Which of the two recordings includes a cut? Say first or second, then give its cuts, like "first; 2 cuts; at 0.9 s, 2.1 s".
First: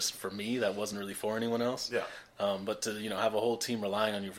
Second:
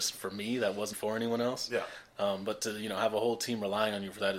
second; 1 cut; at 0.9 s